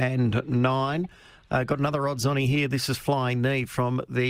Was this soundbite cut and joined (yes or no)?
no